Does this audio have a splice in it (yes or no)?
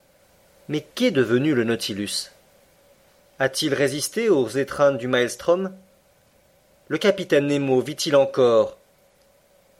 no